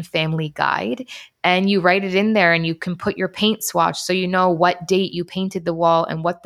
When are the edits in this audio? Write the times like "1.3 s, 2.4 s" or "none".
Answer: none